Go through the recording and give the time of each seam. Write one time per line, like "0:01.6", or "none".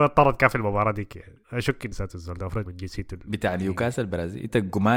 0:01.4
0:01.9
0:02.7